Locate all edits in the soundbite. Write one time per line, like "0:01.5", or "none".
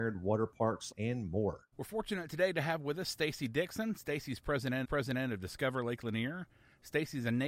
0:00.9
0:01.7
0:04.8